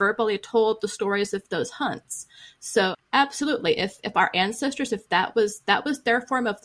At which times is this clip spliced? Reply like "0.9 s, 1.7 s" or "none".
none